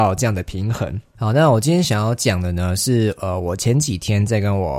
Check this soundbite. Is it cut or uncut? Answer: cut